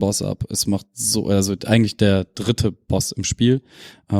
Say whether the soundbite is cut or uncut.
uncut